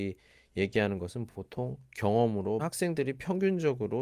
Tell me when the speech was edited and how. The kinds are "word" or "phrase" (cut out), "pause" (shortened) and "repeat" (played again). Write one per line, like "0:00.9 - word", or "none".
0:02.6 - word